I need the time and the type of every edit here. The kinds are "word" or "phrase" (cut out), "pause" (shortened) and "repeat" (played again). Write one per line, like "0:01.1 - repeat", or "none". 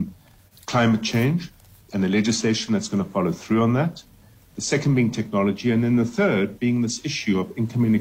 none